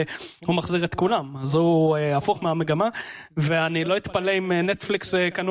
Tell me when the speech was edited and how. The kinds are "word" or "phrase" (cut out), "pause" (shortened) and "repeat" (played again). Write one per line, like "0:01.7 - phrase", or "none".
none